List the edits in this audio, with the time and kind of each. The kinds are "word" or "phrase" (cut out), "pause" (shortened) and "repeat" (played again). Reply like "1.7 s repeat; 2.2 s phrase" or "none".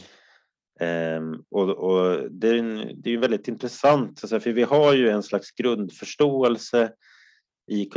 none